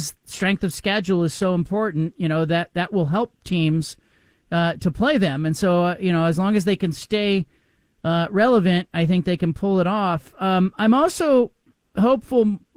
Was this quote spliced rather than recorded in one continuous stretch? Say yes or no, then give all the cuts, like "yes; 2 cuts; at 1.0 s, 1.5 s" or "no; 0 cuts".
no; 0 cuts